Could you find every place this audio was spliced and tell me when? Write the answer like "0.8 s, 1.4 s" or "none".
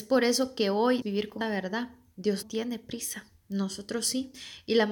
1.0 s, 1.4 s, 2.4 s

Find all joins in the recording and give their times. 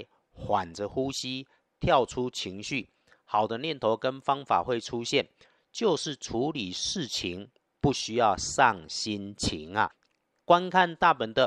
none

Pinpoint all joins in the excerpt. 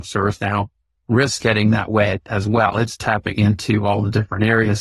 1.4 s

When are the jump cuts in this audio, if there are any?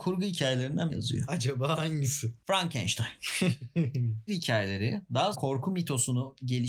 0.9 s, 4.3 s, 5.3 s

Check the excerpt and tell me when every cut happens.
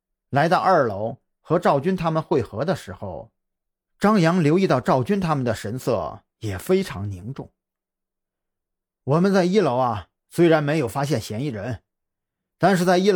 none

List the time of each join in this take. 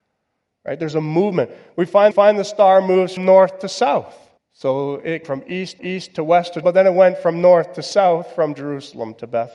2.1 s, 3.2 s, 4.4 s, 5.2 s, 5.8 s, 6.6 s

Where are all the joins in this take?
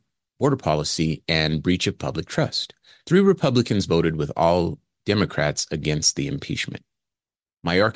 none

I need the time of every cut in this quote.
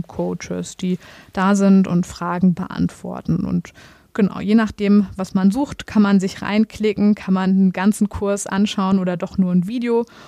none

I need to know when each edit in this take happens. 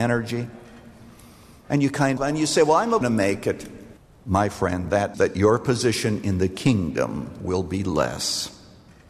2.2 s, 3.0 s, 4.0 s, 5.1 s

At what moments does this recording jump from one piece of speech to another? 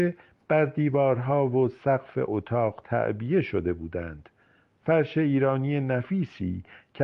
none

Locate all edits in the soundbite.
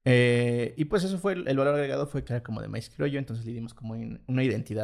2.3 s

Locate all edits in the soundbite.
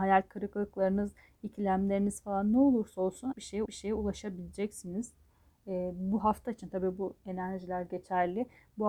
3.3 s, 3.7 s

